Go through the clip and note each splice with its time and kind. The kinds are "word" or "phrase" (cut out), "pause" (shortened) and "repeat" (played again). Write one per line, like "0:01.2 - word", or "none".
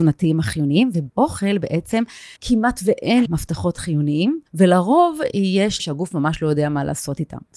0:01.1 - word
0:02.4 - pause
0:03.3 - word
0:04.5 - pause
0:05.8 - phrase